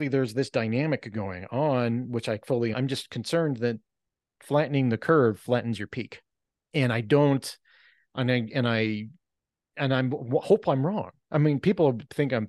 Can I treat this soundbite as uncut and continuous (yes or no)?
no